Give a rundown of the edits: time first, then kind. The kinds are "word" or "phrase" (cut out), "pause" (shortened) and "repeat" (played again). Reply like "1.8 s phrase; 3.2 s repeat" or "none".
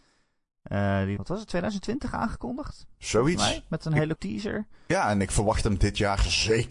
1.2 s word; 4.2 s word